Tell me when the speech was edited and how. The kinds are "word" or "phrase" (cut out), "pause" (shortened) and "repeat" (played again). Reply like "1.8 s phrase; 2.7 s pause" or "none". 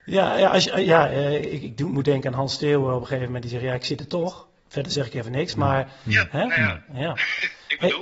none